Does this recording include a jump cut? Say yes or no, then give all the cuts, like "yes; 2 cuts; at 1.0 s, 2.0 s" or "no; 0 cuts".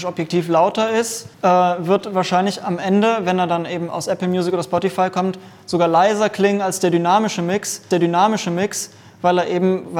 yes; 2 cuts; at 1.3 s, 7.9 s